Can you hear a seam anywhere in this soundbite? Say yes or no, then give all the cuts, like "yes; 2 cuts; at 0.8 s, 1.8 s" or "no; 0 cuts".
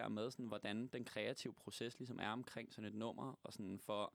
no; 0 cuts